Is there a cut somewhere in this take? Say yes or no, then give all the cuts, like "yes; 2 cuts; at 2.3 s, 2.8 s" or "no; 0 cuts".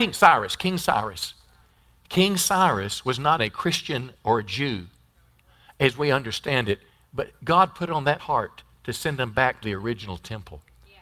yes; 3 cuts; at 3.4 s, 8.2 s, 9.6 s